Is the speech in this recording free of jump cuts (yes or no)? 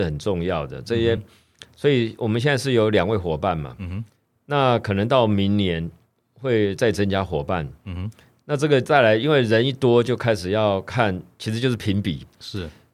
yes